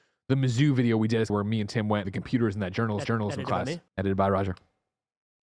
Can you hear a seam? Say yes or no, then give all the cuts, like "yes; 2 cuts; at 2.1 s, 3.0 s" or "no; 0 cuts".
yes; 4 cuts; at 1.3 s, 2.0 s, 3.0 s, 3.9 s